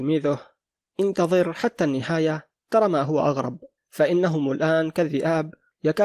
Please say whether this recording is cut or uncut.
cut